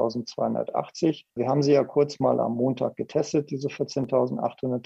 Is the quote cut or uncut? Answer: cut